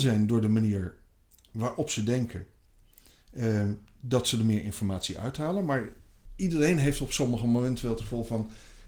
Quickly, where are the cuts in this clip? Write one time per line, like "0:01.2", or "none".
none